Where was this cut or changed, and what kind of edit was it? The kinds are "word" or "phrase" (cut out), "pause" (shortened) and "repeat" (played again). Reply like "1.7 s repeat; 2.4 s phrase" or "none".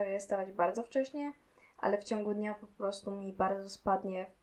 none